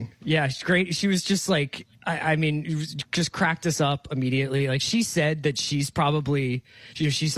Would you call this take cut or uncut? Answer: cut